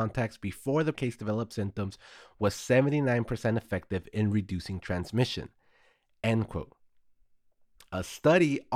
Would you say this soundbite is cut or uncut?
cut